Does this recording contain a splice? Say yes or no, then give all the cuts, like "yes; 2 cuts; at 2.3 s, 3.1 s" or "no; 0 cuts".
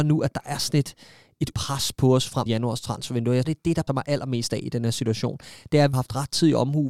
yes; 5 cuts; at 1.5 s, 2.5 s, 3.4 s, 3.9 s, 5.9 s